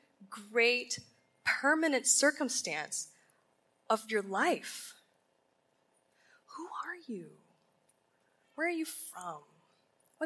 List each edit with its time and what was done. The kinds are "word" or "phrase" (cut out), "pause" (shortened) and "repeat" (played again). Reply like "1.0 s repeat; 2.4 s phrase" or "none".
none